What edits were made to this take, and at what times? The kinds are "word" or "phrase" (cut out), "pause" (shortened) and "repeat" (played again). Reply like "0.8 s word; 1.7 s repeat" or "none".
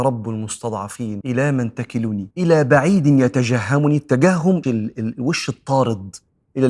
1.2 s phrase; 2.3 s pause; 4.6 s word